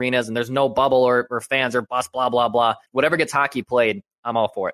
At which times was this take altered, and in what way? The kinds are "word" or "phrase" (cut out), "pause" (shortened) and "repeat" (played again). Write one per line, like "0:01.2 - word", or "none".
0:02.8 - pause